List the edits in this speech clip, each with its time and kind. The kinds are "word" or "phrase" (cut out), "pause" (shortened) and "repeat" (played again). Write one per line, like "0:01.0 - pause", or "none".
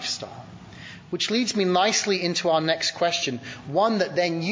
none

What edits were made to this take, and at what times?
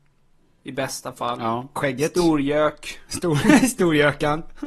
0:01.8 - word

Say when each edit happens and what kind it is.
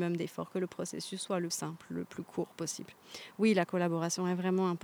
0:01.5 - word

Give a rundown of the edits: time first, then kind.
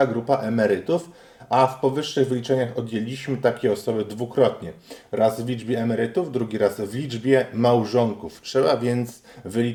none

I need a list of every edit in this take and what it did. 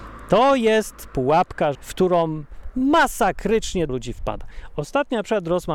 0:01.7 - word
0:03.9 - word

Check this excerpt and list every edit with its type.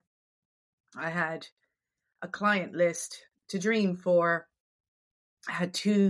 none

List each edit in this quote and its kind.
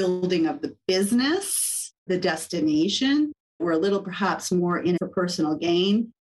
0:02.1 - word
0:03.6 - word
0:05.0 - word

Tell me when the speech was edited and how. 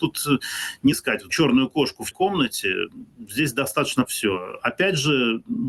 0:00.9 - word
0:01.3 - word
0:02.1 - word
0:04.1 - word

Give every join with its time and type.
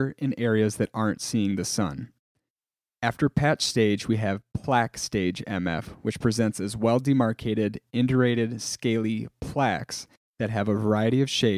none

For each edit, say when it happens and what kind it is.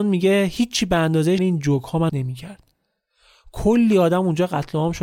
0:01.4 - word
0:02.1 - word

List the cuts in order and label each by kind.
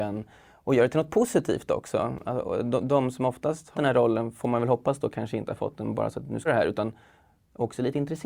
0:03.7 - word
0:06.5 - word

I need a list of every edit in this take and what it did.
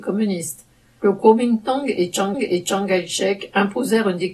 0:02.3 - repeat

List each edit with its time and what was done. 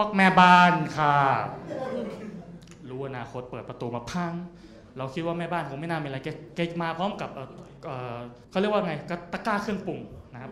0:08.4 - pause

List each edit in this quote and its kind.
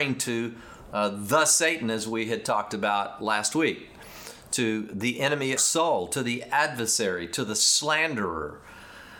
0:05.6 - phrase

